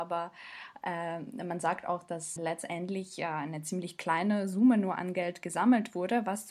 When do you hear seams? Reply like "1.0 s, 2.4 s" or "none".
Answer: 2.4 s

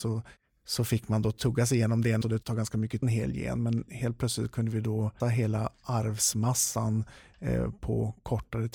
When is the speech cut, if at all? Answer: 2.2 s, 3.0 s, 5.2 s

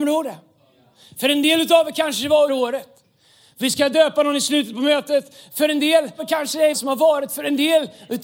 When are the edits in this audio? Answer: 2.5 s, 6.2 s, 6.7 s

